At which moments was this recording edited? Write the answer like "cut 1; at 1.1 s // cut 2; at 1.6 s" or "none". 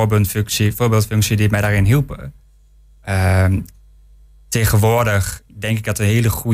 none